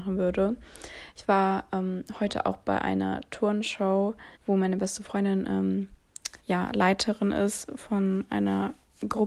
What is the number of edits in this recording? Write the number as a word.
two